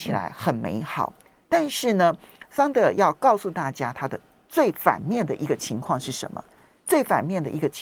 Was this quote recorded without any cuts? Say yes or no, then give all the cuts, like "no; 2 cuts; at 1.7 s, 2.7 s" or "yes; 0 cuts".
yes; 0 cuts